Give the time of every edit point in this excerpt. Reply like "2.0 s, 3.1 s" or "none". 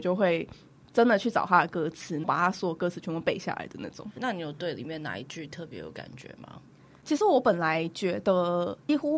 none